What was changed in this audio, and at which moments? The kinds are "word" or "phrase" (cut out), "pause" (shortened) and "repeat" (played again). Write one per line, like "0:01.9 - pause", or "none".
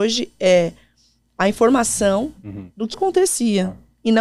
0:02.9 - word

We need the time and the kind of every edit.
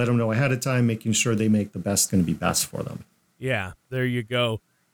0:02.1 - phrase

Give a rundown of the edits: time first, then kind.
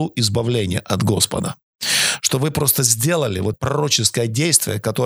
0:03.5 - phrase

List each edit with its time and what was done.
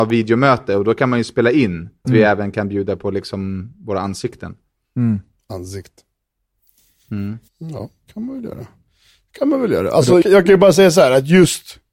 0:02.0 - phrase
0:07.5 - pause
0:10.2 - word

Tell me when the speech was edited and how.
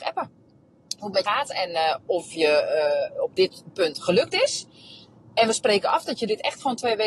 0:01.2 - word

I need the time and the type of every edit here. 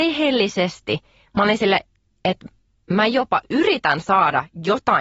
none

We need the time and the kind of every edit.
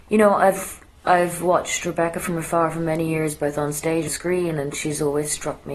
0:04.1 - word

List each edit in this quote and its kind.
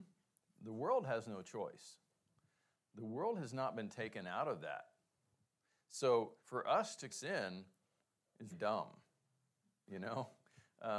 0:06.4 - pause
0:07.1 - phrase
0:08.5 - word

